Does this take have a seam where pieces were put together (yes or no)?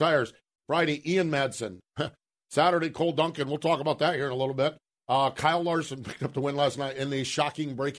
no